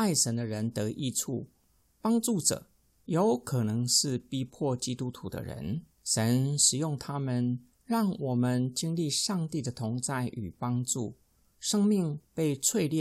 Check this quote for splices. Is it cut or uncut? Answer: cut